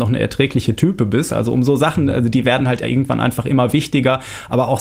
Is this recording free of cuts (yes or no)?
yes